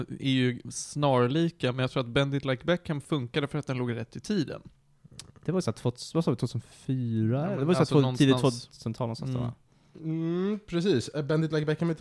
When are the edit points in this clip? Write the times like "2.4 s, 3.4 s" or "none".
none